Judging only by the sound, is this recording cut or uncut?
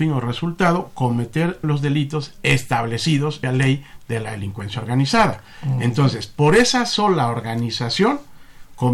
cut